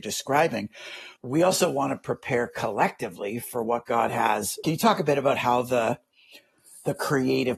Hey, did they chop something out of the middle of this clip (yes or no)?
yes